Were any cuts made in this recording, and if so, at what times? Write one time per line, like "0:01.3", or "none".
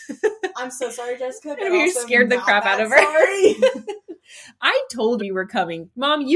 0:05.2